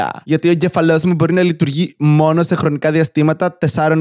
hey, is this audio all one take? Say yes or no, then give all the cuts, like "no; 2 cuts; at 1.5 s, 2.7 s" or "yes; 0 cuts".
yes; 0 cuts